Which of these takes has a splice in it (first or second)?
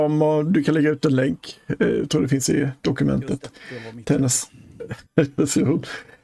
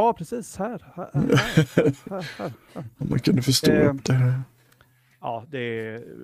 first